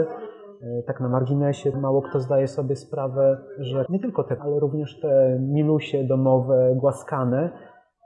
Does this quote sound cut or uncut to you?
cut